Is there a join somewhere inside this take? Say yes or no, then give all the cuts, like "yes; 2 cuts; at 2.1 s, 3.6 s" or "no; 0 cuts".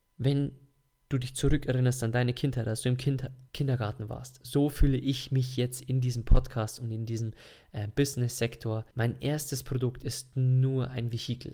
yes; 2 cuts; at 3.5 s, 8.9 s